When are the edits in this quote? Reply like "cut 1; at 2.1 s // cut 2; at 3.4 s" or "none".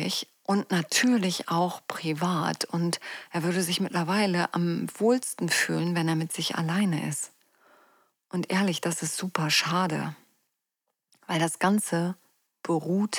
none